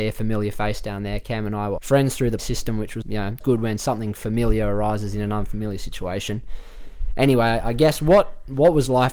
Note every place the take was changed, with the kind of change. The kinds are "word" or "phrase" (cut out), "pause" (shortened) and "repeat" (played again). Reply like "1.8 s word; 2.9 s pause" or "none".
1.8 s word; 2.4 s word; 3.0 s word; 3.4 s word